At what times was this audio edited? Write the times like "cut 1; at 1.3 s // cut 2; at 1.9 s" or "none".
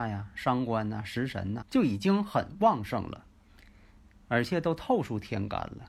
cut 1; at 1.6 s